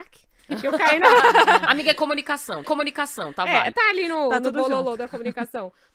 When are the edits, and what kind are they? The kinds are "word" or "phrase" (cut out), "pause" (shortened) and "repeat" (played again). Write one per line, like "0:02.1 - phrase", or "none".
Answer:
0:02.6 - repeat
0:03.7 - word